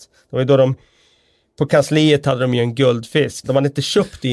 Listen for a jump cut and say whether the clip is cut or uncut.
cut